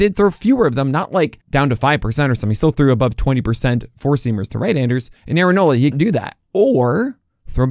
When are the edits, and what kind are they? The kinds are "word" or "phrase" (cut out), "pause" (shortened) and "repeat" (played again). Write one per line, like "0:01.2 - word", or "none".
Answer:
0:01.4 - pause
0:05.2 - pause
0:05.9 - phrase
0:06.4 - pause